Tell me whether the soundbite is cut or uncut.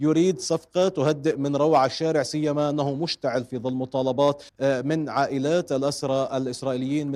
cut